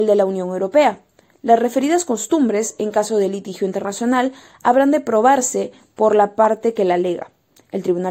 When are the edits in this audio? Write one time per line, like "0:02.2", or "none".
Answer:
none